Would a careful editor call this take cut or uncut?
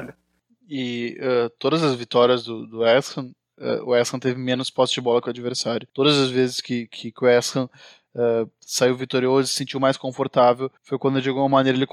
cut